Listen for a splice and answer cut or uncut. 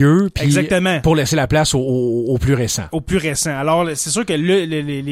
uncut